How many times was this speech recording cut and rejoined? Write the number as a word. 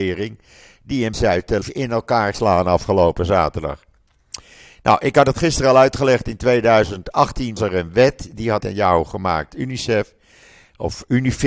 six